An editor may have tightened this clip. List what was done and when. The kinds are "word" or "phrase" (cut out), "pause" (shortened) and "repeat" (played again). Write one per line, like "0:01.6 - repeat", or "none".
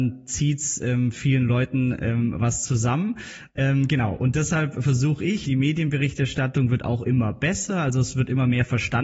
0:05.4 - word